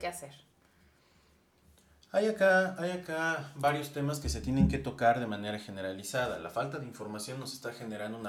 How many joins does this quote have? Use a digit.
0